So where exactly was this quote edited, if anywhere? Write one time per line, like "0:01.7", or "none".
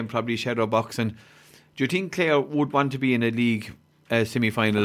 none